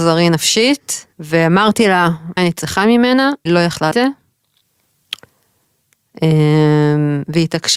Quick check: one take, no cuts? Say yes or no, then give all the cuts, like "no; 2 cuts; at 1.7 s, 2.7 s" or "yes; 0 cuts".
no; 4 cuts; at 1.1 s, 2.4 s, 3.5 s, 3.9 s